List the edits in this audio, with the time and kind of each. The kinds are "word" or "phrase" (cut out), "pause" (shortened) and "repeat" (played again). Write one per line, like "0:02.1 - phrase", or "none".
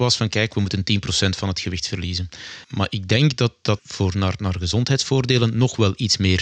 0:02.6 - pause
0:03.8 - word